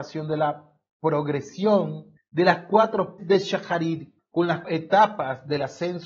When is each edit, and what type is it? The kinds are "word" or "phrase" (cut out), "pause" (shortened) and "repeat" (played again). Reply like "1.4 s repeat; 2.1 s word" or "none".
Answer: 2.2 s pause; 3.2 s word; 4.2 s pause; 4.6 s word